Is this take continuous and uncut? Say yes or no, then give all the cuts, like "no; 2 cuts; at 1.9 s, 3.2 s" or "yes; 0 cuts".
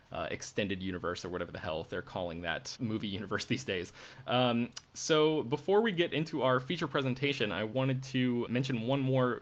no; 2 cuts; at 2.8 s, 8.5 s